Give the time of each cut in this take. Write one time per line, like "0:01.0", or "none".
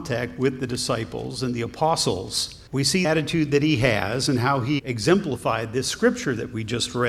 0:02.7
0:03.0
0:04.8

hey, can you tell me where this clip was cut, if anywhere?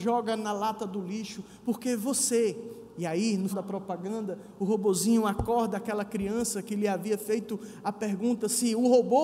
0:03.5

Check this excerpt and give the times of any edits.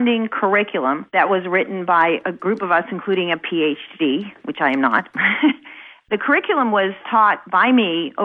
none

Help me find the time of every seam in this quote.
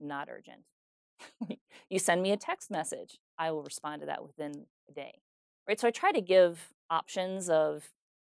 0:06.8

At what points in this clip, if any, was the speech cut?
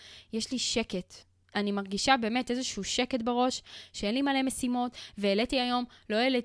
none

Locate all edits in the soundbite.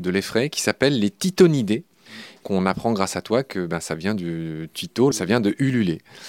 0:02.4

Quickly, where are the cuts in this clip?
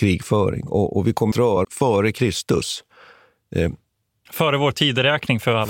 0:01.3
0:01.6
0:04.3

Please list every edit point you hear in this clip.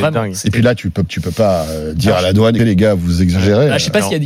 0:01.1
0:02.6

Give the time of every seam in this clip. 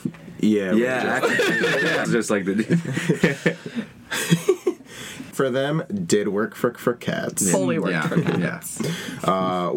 0:02.0
0:05.3
0:06.7

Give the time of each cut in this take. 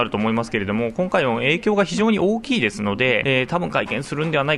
0:03.2

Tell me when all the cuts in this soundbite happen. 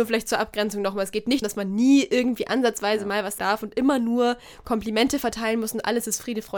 0:01.4
0:03.4

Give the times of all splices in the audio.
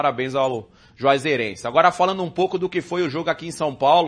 none

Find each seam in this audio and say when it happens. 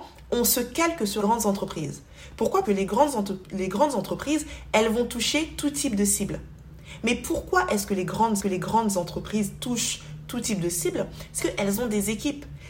0:01.2
0:02.6
0:08.4
0:11.4

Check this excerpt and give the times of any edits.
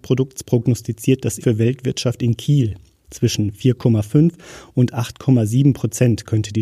0:01.4

